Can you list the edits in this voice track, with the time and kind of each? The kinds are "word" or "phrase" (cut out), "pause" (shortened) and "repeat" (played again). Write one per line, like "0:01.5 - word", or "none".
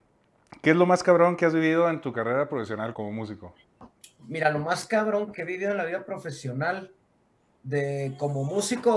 0:02.9 - word
0:05.3 - word